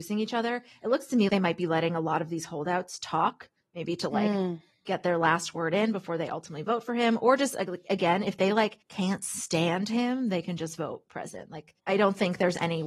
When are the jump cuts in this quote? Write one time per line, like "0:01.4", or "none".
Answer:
0:01.3
0:08.8
0:11.8